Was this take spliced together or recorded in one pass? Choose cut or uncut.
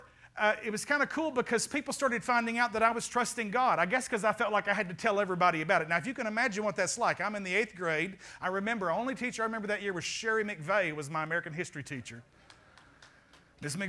uncut